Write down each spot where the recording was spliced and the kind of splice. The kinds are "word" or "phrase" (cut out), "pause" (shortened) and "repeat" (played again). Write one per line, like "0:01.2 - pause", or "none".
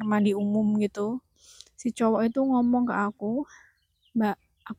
none